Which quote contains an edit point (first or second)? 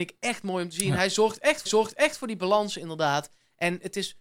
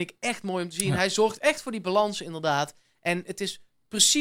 first